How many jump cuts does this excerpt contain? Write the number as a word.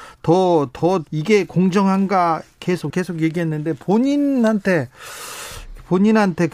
two